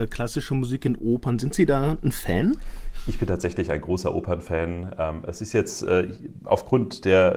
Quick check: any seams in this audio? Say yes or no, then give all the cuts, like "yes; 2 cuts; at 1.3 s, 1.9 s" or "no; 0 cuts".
no; 0 cuts